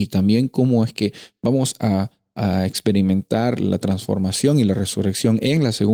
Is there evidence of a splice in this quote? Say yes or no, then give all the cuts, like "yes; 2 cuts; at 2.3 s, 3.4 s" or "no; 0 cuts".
no; 0 cuts